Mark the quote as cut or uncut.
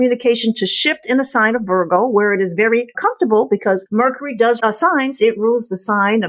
cut